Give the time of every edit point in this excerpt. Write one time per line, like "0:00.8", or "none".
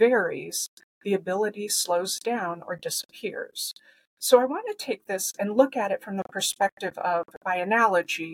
0:07.4